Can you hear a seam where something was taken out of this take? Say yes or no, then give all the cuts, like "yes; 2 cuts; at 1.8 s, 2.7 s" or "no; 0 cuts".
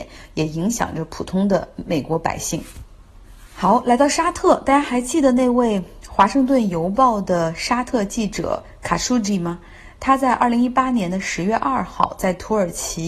no; 0 cuts